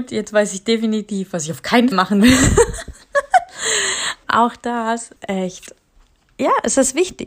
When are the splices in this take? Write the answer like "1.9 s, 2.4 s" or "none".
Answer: 1.9 s, 4.2 s, 5.2 s